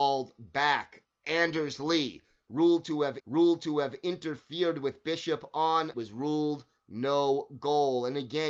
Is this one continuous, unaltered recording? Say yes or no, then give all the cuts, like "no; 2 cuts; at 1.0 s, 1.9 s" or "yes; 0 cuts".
no; 3 cuts; at 1.0 s, 3.2 s, 5.9 s